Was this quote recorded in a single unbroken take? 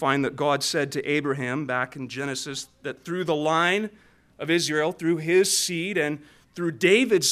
yes; 0 cuts

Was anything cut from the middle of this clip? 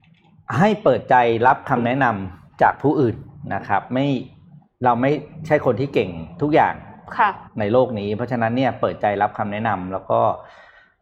yes; 1 cut; at 7.5 s

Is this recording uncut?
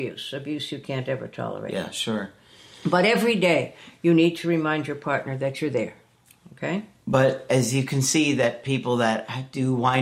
yes; 0 cuts

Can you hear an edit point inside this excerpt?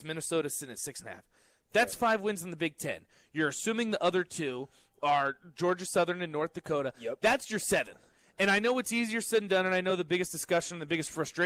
no; 0 cuts

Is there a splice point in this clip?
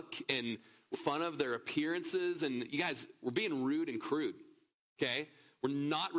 yes; 1 cut; at 0.9 s

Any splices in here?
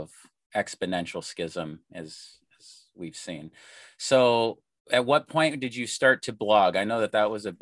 no; 0 cuts

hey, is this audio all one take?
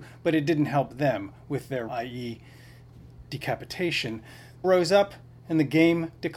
no; 2 cuts; at 1.9 s, 4.6 s

